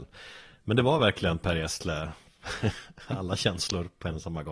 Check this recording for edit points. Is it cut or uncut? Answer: uncut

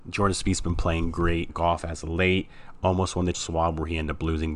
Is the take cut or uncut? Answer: cut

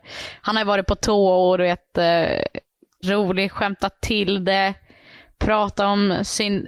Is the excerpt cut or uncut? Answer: cut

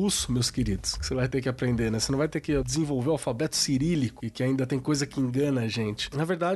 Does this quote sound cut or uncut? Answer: uncut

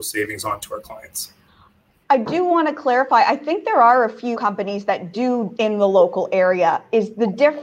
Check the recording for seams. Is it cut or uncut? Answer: cut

